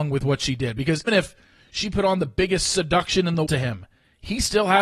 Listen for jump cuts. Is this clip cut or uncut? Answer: cut